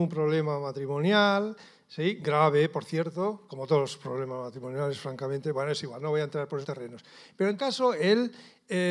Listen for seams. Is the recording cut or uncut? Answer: cut